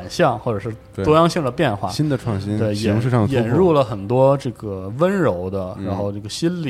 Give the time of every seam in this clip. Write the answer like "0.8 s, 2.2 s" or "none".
none